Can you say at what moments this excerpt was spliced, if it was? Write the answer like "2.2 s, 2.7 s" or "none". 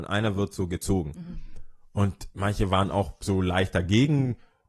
none